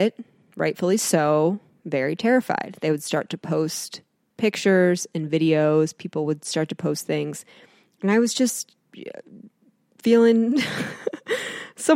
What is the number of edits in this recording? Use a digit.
0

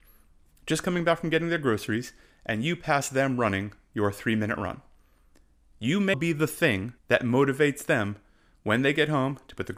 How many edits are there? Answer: 2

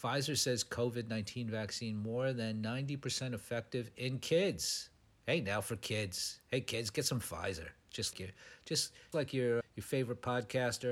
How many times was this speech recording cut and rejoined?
3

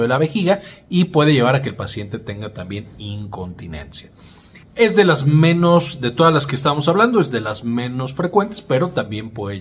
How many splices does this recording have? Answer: 1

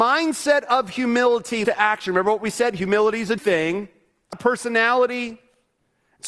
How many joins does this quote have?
3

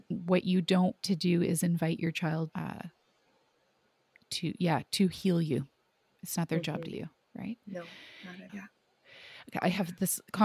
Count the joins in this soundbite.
4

